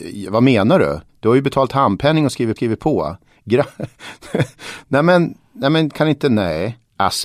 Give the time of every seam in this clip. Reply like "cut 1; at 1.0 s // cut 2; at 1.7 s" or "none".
cut 1; at 1.1 s // cut 2; at 2.6 s

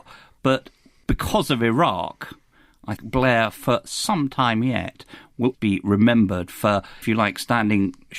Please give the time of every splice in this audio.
cut 1; at 3.0 s // cut 2; at 5.5 s // cut 3; at 7.0 s

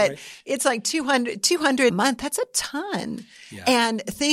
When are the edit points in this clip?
cut 1; at 1.9 s

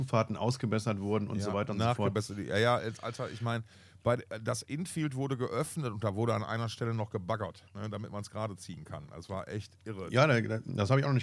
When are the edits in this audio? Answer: cut 1; at 7.7 s

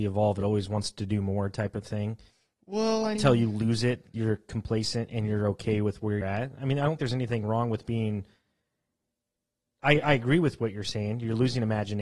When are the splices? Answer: cut 1; at 2.3 s // cut 2; at 3.1 s // cut 3; at 4.1 s // cut 4; at 6.2 s // cut 5; at 7.0 s

